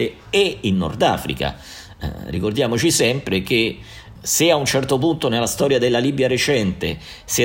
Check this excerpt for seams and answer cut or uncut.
uncut